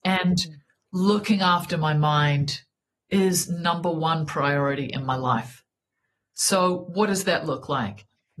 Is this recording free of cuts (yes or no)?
yes